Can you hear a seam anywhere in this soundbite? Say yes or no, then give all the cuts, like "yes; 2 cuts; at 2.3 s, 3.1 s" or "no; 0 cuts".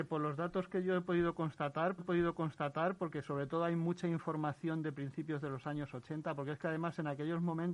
yes; 1 cut; at 2.0 s